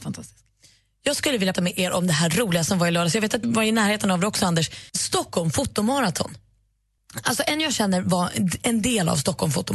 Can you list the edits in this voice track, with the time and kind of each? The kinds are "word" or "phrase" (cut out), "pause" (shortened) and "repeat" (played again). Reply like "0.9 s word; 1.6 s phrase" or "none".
1.5 s word; 3.4 s word; 4.9 s pause